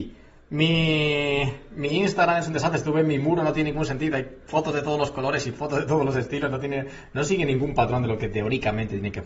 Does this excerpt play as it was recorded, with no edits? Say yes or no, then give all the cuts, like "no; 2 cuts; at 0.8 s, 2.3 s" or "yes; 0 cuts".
yes; 0 cuts